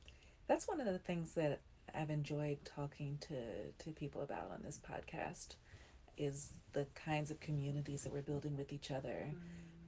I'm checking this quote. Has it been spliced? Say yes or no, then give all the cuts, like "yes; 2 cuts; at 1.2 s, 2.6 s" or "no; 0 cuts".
yes; 1 cut; at 6.2 s